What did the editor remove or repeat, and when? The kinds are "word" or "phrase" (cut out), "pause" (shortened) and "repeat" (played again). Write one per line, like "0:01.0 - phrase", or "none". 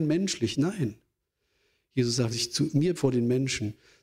0:02.3 - word
0:02.9 - word